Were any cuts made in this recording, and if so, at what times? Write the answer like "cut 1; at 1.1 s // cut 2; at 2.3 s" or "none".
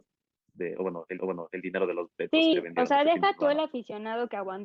cut 1; at 1.2 s // cut 2; at 2.5 s